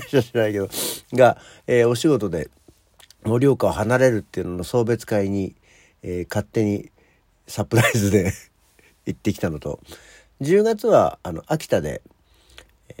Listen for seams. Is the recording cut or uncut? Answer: uncut